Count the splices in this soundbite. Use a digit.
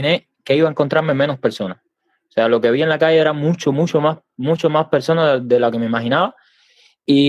0